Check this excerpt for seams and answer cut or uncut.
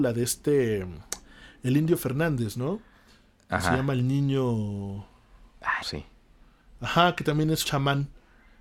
cut